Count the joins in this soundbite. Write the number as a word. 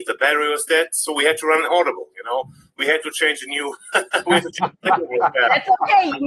zero